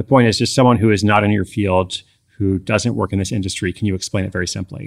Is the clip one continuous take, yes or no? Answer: yes